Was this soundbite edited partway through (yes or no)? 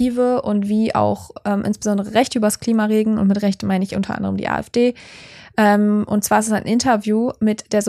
no